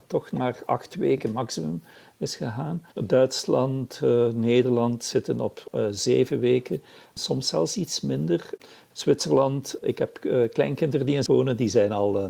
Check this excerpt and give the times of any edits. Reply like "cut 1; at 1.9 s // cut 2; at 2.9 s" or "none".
cut 1; at 2.9 s // cut 2; at 9.8 s // cut 3; at 11.3 s